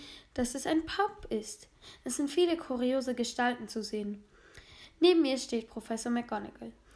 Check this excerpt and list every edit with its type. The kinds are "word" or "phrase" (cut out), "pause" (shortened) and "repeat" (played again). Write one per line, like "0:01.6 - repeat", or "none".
none